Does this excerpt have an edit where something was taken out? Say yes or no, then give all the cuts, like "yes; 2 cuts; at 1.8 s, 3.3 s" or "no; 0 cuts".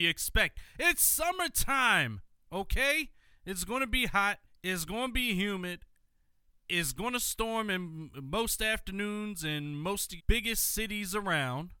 yes; 2 cuts; at 4.5 s, 10.2 s